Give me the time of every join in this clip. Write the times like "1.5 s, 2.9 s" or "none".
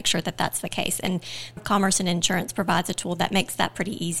1.6 s